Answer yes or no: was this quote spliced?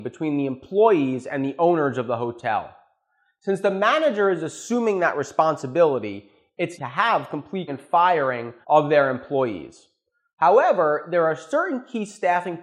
yes